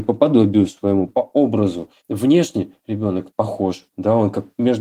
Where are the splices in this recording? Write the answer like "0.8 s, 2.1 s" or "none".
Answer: 1.1 s